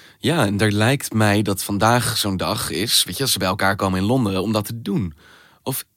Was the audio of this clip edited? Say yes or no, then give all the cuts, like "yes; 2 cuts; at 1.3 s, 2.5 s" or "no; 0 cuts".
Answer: no; 0 cuts